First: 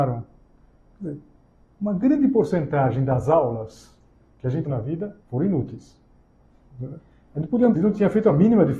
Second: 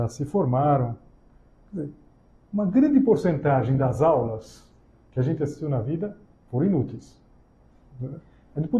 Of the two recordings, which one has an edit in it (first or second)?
first